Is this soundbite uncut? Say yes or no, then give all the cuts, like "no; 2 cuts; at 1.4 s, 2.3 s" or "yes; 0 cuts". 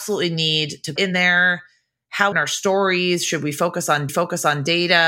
no; 3 cuts; at 1.0 s, 2.3 s, 4.1 s